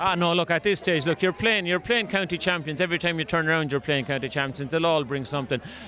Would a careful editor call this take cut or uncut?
uncut